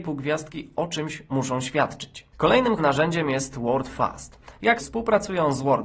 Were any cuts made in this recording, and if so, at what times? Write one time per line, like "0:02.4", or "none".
0:02.8
0:04.8